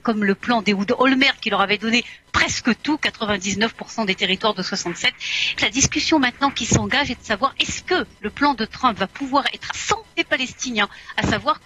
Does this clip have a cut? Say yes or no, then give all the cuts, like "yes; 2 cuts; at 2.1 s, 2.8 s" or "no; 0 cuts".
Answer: yes; 3 cuts; at 5.6 s, 8.1 s, 9.7 s